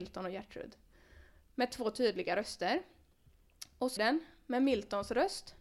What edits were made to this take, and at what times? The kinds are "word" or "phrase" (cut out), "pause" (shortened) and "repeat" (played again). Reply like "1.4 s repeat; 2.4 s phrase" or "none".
4.0 s word